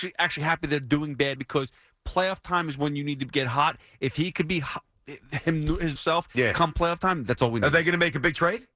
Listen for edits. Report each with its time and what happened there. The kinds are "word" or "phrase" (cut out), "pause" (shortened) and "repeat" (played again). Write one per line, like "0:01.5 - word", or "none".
0:01.4 - word
0:06.0 - word